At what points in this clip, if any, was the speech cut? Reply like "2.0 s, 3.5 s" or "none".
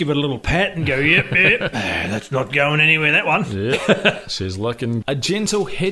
5.0 s